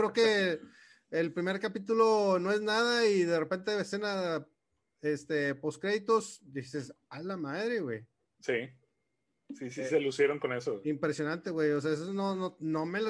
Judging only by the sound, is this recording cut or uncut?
uncut